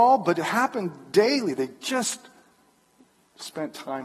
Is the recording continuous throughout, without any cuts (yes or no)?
yes